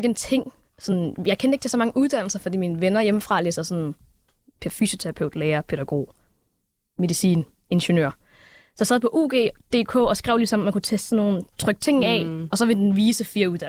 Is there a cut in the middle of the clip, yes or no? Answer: no